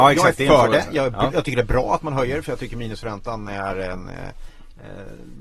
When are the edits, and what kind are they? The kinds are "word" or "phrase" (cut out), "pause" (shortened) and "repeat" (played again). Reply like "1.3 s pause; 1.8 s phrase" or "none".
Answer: none

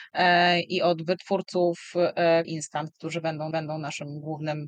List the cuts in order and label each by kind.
2.4 s word; 3.5 s repeat

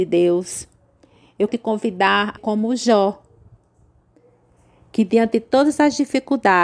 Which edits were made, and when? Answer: 1.5 s word; 2.4 s word

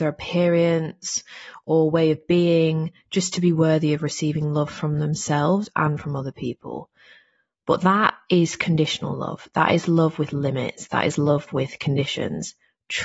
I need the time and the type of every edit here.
none

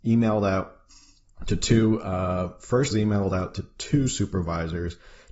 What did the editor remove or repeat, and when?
2.9 s word

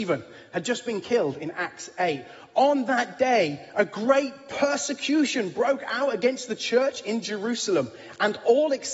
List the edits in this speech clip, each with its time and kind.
none

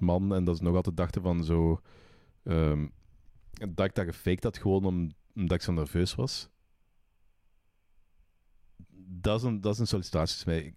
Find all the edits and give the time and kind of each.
none

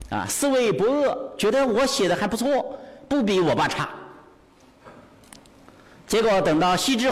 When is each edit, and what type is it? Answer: none

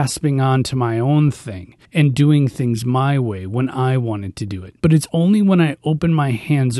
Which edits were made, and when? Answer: 1.8 s pause; 4.8 s pause

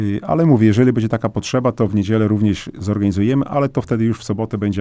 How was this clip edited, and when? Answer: none

